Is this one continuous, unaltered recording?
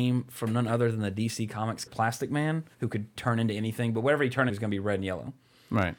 no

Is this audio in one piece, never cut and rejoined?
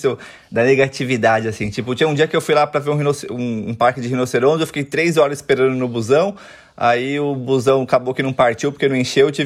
yes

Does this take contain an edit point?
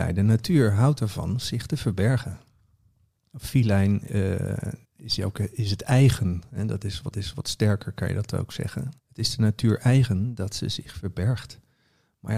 yes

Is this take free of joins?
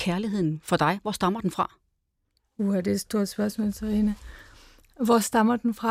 yes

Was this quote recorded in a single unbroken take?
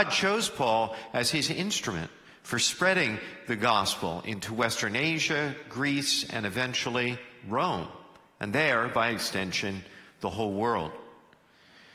yes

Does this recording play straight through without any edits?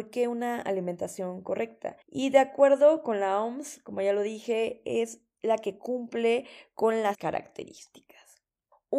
no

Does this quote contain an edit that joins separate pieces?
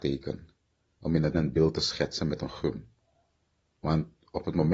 yes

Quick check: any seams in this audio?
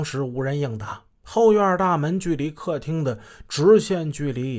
yes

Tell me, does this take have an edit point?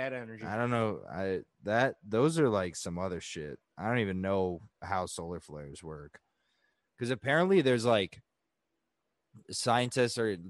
no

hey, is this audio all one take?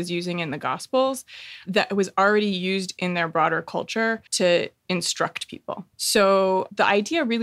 no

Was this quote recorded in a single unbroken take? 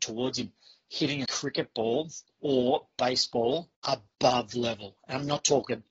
no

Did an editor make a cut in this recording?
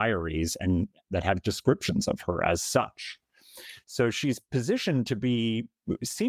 no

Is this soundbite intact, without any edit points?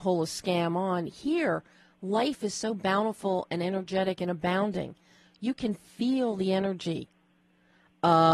yes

